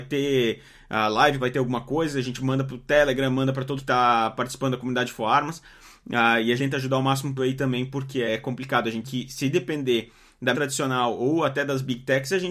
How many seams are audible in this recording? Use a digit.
7